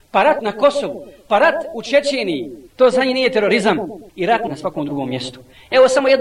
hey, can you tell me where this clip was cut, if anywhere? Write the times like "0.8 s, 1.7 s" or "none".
2.7 s, 4.1 s